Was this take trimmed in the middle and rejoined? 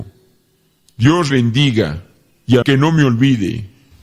yes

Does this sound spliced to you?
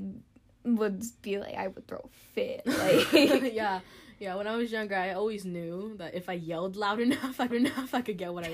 yes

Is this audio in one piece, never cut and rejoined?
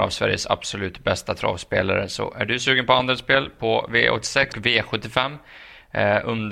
no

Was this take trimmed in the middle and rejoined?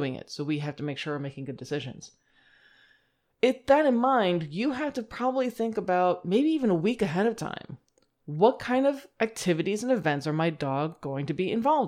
no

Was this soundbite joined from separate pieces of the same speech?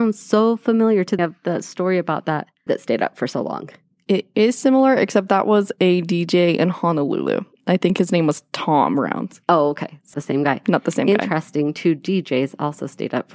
yes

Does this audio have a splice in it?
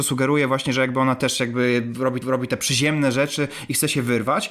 yes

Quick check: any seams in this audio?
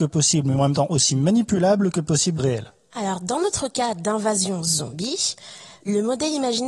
yes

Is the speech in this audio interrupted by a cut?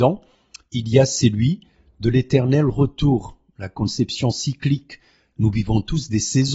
no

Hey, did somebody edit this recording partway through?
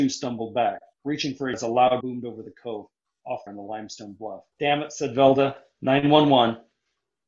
yes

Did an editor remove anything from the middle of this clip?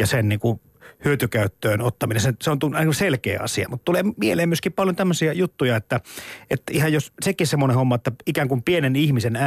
no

